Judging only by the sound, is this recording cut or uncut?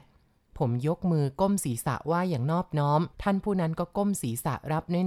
cut